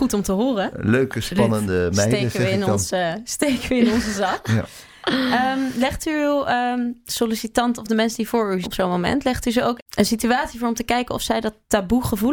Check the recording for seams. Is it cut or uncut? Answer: cut